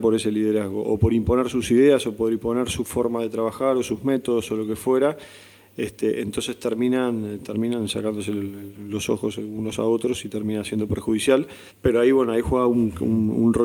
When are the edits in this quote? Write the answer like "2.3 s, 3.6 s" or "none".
11.7 s